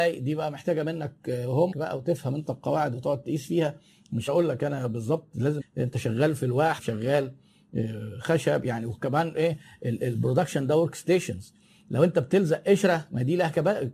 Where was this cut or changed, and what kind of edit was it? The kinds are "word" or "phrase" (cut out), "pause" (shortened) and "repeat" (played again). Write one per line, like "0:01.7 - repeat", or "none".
0:01.7 - word
0:04.3 - word
0:05.6 - word
0:06.8 - word